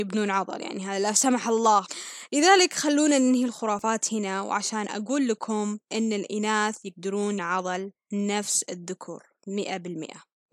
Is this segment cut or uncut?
cut